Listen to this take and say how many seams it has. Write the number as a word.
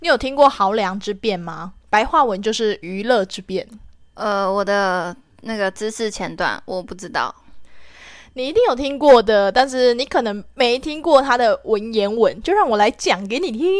one